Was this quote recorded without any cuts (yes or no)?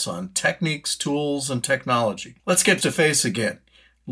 no